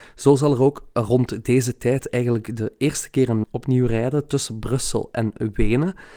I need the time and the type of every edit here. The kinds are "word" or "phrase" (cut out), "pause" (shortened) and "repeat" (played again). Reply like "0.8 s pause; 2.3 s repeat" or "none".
3.4 s word